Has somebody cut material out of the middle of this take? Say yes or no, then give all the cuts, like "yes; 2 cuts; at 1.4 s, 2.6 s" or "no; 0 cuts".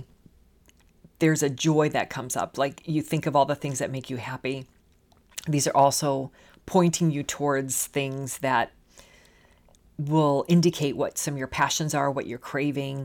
no; 0 cuts